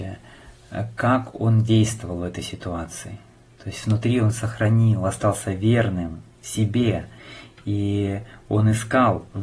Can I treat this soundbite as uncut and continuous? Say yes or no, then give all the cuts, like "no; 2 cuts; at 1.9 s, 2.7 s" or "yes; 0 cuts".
yes; 0 cuts